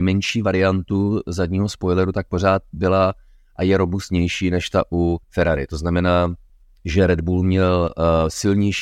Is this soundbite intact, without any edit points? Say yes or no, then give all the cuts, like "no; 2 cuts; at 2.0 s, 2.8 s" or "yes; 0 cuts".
no; 2 cuts; at 5.2 s, 6.5 s